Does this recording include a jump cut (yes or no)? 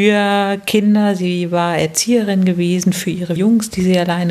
yes